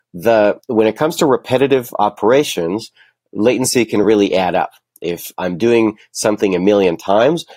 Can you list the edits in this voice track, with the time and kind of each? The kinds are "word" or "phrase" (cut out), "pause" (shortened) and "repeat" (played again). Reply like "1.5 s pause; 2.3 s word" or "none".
none